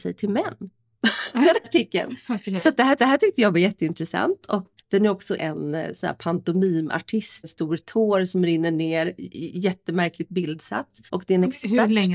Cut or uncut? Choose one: cut